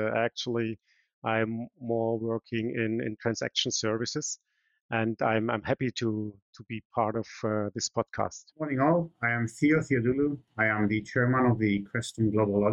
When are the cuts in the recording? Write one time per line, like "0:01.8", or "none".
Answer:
0:08.5